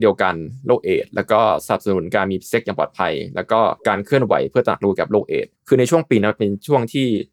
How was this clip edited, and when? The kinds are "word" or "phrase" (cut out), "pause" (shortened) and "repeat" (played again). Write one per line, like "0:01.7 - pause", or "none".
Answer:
0:03.8 - pause
0:05.6 - pause